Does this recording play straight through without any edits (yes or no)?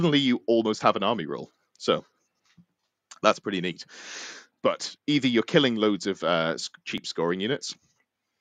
no